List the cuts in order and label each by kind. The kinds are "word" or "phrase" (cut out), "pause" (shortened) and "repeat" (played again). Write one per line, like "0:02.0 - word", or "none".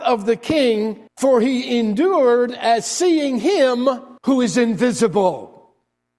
0:01.1 - pause
0:04.2 - pause